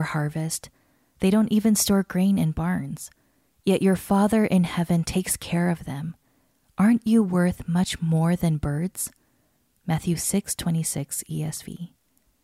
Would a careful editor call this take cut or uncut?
uncut